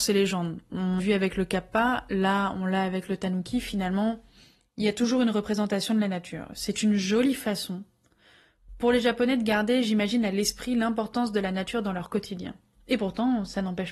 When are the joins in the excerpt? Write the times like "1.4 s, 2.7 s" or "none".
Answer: 1.0 s